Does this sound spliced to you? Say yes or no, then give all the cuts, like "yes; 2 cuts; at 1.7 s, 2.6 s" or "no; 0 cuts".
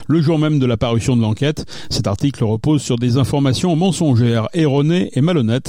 no; 0 cuts